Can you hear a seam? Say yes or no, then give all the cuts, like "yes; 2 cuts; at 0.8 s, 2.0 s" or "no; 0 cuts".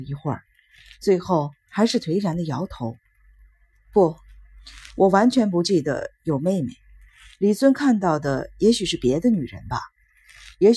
yes; 1 cut; at 4.9 s